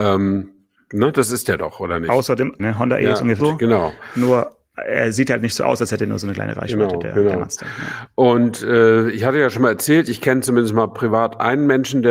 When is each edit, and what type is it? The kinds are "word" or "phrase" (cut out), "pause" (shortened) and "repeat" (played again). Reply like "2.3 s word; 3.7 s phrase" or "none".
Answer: 2.6 s phrase; 3.4 s word